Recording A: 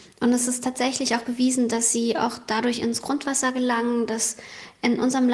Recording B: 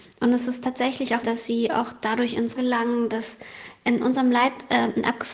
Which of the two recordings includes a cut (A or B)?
B